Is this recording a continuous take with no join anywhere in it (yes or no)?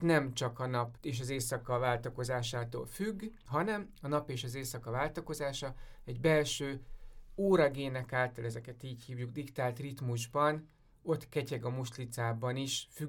yes